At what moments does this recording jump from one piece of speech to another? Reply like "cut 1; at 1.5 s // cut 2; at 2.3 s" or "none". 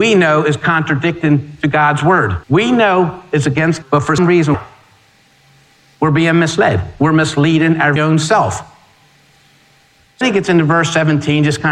cut 1; at 2.4 s // cut 2; at 3.8 s // cut 3; at 4.2 s // cut 4; at 4.5 s // cut 5; at 8.0 s // cut 6; at 10.2 s